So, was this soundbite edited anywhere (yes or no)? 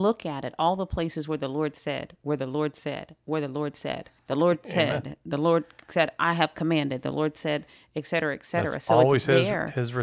yes